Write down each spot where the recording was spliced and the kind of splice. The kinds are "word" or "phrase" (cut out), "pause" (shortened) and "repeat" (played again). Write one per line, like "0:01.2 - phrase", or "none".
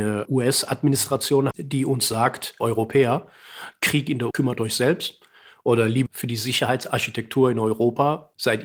0:01.5 - word
0:02.6 - word
0:04.3 - word
0:06.1 - word